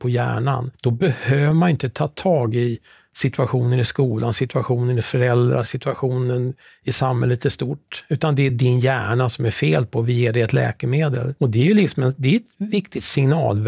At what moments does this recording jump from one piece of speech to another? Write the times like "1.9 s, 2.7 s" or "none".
none